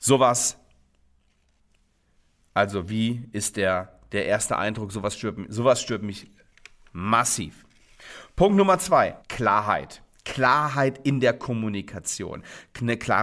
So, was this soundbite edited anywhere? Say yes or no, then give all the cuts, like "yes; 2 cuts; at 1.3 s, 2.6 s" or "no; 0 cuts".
yes; 1 cut; at 9.2 s